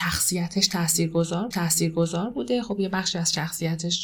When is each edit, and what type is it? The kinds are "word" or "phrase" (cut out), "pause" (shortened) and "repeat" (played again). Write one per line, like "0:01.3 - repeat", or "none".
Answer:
0:01.5 - repeat